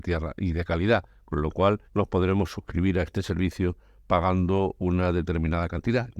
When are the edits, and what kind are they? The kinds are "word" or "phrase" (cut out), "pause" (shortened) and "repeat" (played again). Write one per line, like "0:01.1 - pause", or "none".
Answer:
0:01.8 - pause